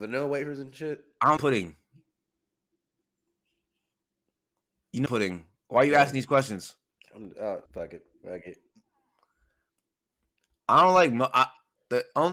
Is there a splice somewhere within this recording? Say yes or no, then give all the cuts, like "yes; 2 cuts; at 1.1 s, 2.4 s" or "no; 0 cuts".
yes; 4 cuts; at 1.4 s, 5.1 s, 7.7 s, 8.1 s